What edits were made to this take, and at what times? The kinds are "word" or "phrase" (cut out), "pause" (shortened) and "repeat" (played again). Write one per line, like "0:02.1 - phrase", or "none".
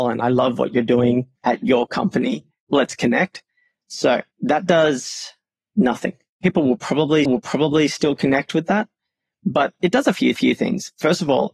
0:01.4 - pause
0:04.3 - pause
0:07.3 - repeat
0:10.4 - repeat